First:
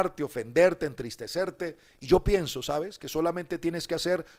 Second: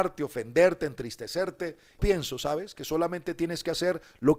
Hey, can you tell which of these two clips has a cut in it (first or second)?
second